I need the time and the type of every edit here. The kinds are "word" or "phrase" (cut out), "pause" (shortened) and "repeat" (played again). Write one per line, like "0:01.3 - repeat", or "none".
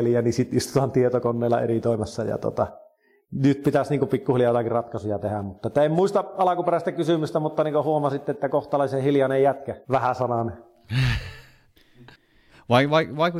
0:09.8 - pause